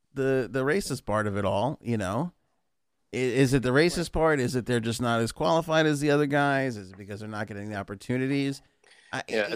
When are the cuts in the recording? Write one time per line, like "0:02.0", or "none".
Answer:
none